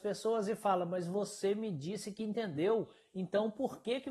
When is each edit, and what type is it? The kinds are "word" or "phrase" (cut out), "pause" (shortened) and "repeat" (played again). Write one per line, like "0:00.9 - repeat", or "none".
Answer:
none